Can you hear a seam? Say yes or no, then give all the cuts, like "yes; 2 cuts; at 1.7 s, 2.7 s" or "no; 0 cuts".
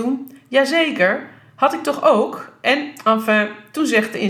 no; 0 cuts